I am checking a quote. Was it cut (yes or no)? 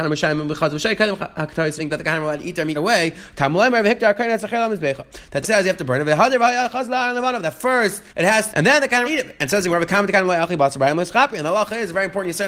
yes